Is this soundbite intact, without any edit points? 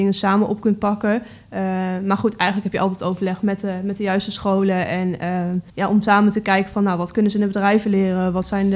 no; 1 cut; at 5.7 s

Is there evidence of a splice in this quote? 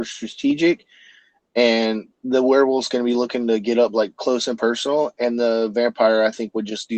no; 0 cuts

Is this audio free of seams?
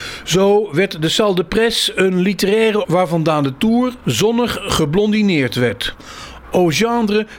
no; 1 cut; at 2.8 s

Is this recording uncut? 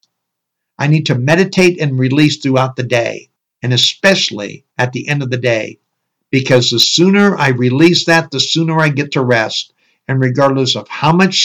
no; 2 cuts; at 3.4 s, 4.7 s

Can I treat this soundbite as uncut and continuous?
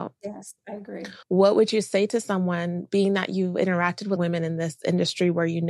no; 2 cuts; at 1.2 s, 4.2 s

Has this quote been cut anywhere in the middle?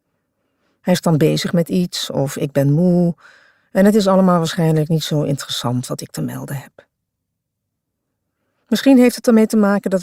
no; 0 cuts

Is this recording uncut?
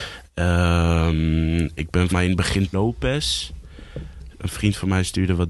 no; 3 cuts; at 1.8 s, 2.1 s, 2.7 s

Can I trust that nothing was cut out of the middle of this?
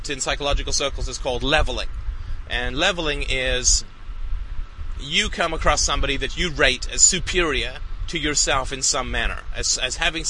yes; 0 cuts

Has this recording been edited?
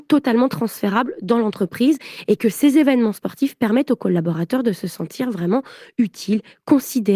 no; 0 cuts

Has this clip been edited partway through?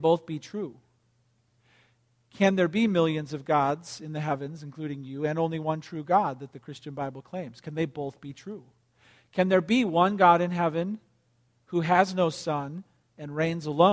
no; 0 cuts

